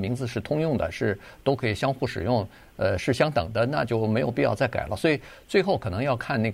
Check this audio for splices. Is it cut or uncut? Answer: uncut